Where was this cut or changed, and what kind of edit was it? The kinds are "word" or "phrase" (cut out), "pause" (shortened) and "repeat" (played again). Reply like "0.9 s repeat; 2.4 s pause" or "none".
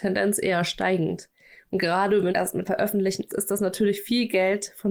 2.3 s word; 2.7 s word; 3.3 s word

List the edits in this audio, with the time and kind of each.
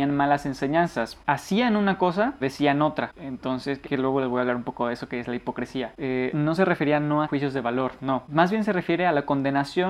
2.4 s word; 3.8 s word; 6.3 s word; 7.2 s word

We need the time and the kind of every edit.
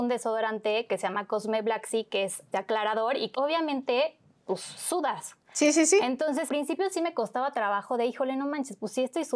2.5 s word; 3.3 s word; 6.5 s word

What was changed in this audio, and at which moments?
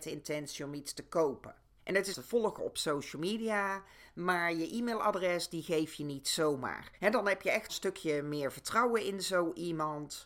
1.8 s pause; 2.1 s phrase; 7.0 s pause; 7.7 s phrase

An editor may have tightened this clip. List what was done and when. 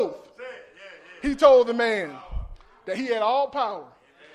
none

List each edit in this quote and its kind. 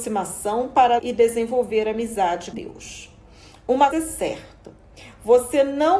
1.0 s word; 2.5 s word; 3.9 s word

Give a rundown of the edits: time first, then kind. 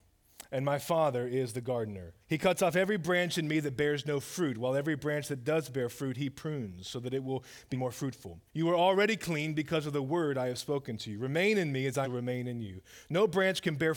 2.2 s pause; 7.7 s word; 8.5 s pause; 12.0 s word

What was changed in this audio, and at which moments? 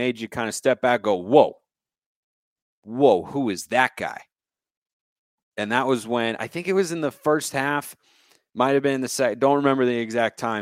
none

